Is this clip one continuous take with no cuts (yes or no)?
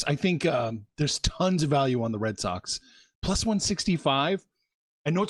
yes